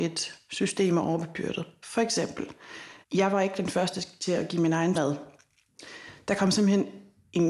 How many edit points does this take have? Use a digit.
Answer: 2